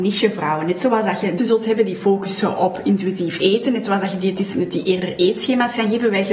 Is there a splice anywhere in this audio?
yes; 1 cut; at 1.4 s

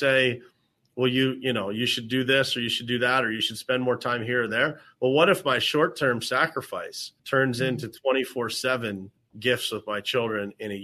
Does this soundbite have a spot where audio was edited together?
yes; 2 cuts; at 7.2 s, 9.2 s

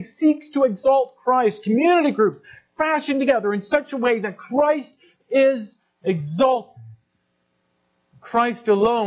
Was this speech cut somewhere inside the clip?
no; 0 cuts

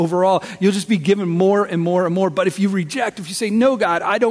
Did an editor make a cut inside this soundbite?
no; 0 cuts

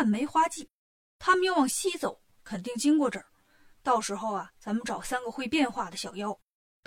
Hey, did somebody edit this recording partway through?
no; 0 cuts

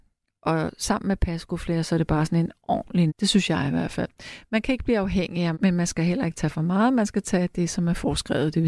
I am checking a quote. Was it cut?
yes; 2 cuts; at 3.1 s, 5.5 s

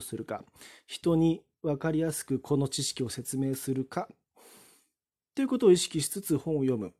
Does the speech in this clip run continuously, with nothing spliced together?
yes; 0 cuts

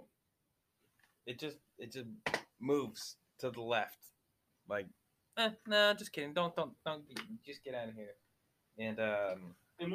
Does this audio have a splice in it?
no; 0 cuts

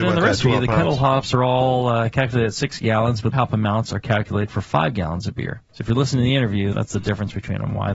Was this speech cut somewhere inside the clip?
yes; 3 cuts; at 3.3 s, 5.7 s, 6.7 s

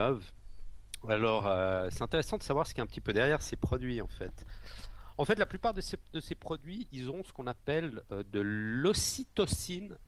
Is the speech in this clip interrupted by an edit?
no; 0 cuts

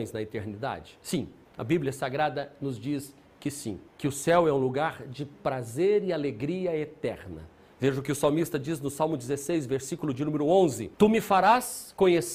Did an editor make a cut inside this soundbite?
yes; 4 cuts; at 1.5 s, 3.9 s, 7.7 s, 10.9 s

